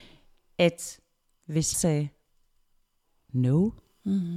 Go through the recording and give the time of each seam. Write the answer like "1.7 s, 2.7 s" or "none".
1.7 s